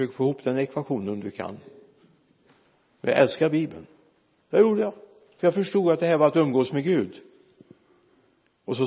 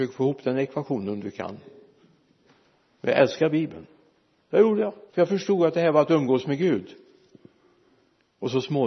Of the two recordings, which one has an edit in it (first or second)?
second